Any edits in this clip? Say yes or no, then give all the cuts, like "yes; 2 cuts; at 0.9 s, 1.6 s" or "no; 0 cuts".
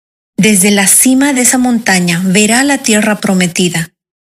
no; 0 cuts